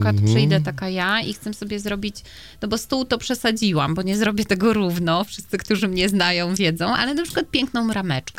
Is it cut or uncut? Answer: uncut